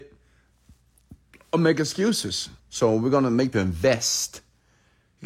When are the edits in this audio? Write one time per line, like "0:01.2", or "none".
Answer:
0:02.6
0:03.5

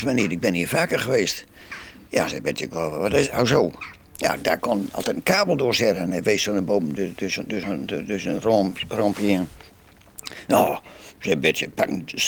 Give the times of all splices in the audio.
none

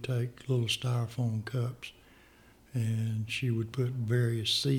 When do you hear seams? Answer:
none

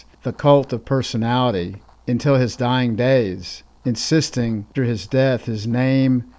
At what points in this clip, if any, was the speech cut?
0:04.7

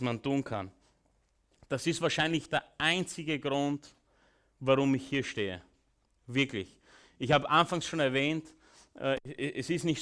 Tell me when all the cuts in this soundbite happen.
none

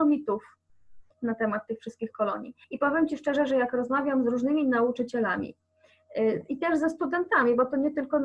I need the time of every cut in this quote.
0:01.1
0:02.6

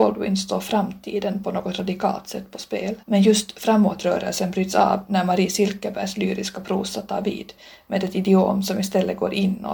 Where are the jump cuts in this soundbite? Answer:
0:03.0

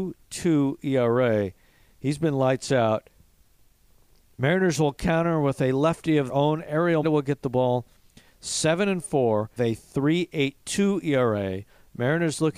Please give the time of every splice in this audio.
0:06.3
0:07.0
0:09.6

